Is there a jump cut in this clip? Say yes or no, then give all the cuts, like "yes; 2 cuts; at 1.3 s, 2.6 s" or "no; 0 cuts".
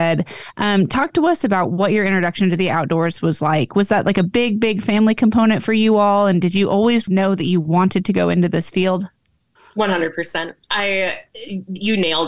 no; 0 cuts